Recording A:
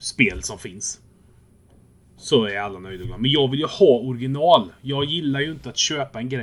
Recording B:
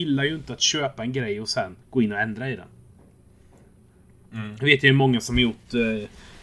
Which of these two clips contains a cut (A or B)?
B